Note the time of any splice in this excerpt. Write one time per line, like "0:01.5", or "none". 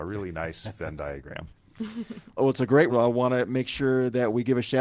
0:02.4
0:02.9

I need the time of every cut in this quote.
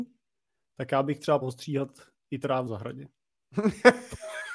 0:01.4
0:02.7

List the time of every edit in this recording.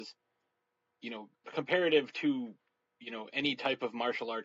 0:01.4

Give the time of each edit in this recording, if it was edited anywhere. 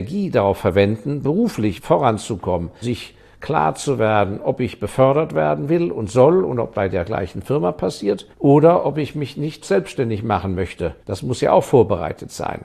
0:01.8
0:02.8
0:06.7
0:08.3
0:09.6
0:11.0

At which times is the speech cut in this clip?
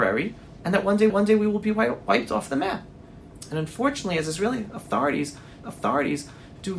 0:01.1
0:05.6

